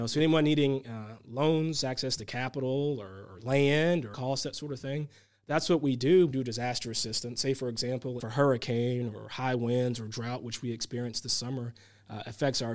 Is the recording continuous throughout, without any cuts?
no; 3 cuts; at 4.1 s, 6.3 s, 8.2 s

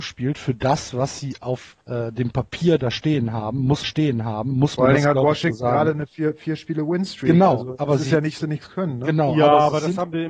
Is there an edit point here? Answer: yes; 3 cuts; at 1.8 s, 3.8 s, 8.4 s

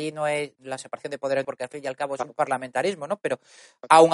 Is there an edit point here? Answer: yes; 1 cut; at 1.4 s

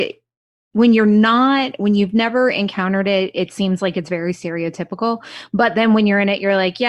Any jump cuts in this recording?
no; 0 cuts

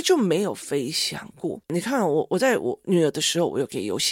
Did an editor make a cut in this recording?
yes; 1 cut; at 1.6 s

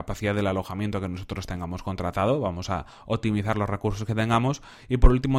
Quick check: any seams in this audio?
no; 0 cuts

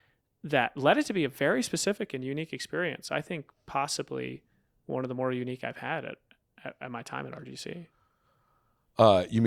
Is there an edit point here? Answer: no; 0 cuts

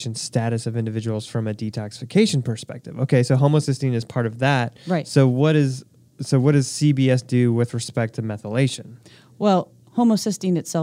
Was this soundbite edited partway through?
no; 0 cuts

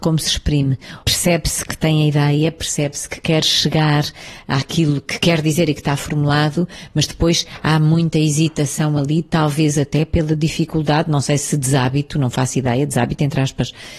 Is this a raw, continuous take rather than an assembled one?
yes; 0 cuts

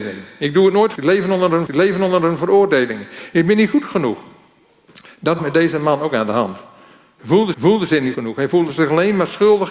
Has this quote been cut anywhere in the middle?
yes; 5 cuts; at 1.0 s, 1.7 s, 5.4 s, 7.5 s, 8.1 s

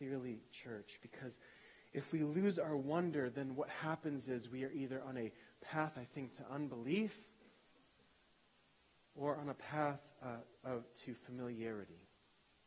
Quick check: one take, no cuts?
yes; 0 cuts

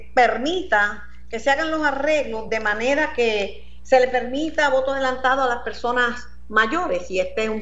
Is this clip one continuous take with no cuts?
yes; 0 cuts

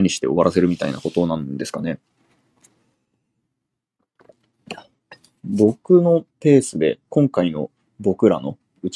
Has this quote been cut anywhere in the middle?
yes; 1 cut; at 6.3 s

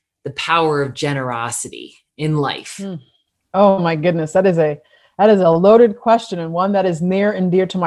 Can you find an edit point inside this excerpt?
no; 0 cuts

